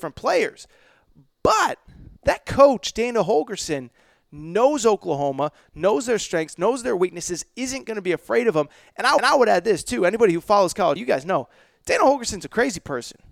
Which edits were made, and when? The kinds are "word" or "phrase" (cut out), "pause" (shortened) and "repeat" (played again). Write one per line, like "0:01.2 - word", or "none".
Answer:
0:02.2 - pause
0:09.2 - repeat
0:11.0 - word